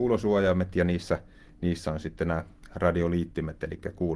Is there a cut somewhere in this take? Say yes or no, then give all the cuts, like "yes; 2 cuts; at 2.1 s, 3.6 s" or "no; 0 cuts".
no; 0 cuts